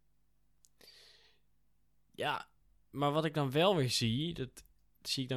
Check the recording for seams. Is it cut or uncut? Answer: uncut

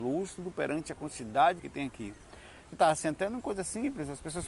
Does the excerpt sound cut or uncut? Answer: cut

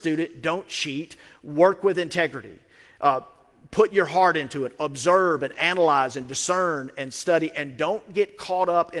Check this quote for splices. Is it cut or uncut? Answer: uncut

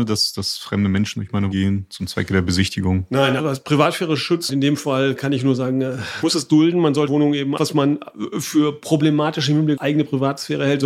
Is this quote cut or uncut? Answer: cut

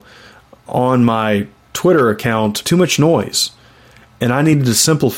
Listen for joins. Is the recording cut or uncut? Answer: cut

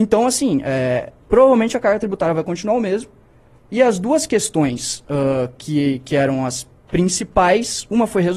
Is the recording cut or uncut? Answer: uncut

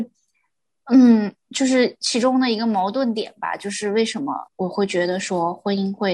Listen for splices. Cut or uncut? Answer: cut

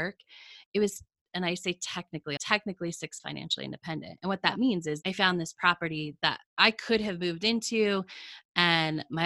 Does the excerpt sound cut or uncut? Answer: cut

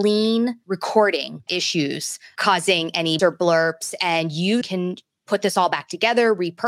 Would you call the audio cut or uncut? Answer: cut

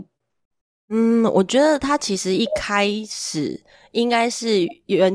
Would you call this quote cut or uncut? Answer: uncut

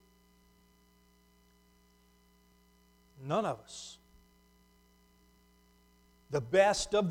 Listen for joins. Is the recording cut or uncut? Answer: uncut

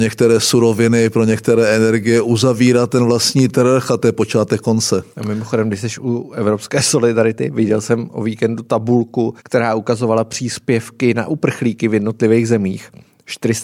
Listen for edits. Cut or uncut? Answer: cut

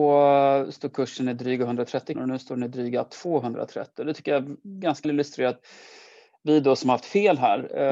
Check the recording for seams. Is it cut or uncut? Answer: cut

